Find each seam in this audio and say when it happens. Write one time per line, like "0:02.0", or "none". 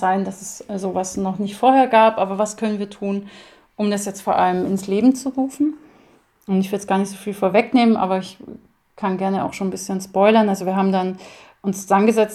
none